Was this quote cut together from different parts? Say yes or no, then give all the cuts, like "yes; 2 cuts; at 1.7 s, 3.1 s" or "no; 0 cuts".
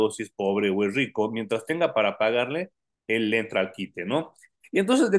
no; 0 cuts